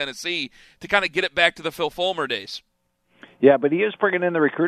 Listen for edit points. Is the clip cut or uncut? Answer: uncut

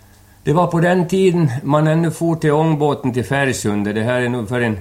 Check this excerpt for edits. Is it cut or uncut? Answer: uncut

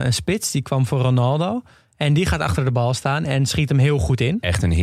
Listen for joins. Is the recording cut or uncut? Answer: uncut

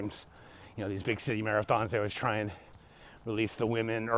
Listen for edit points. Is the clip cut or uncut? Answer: uncut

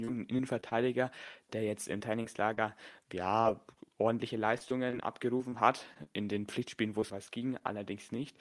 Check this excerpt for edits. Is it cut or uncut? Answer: cut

